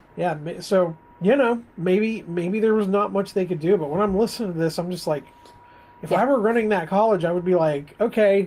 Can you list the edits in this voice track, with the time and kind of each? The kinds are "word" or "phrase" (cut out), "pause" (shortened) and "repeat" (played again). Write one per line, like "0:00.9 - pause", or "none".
none